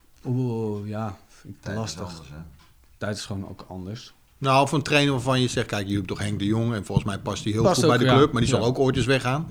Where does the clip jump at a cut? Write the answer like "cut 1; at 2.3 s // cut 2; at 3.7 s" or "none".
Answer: none